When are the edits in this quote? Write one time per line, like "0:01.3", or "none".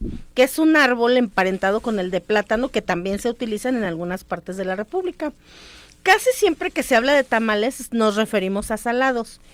none

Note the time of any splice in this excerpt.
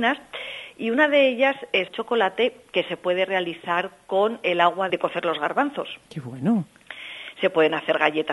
0:01.9
0:04.9

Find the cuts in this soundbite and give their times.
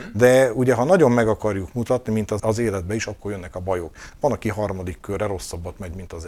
0:02.4

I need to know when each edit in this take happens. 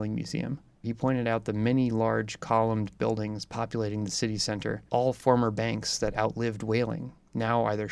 0:04.9

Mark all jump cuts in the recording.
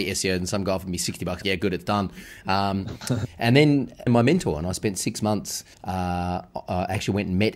0:01.4
0:04.1
0:05.7

